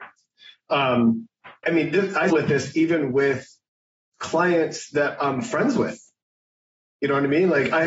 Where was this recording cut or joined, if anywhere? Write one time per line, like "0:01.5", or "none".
0:01.6
0:02.3
0:05.2